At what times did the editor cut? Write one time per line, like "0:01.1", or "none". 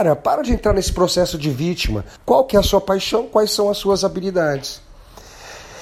0:02.2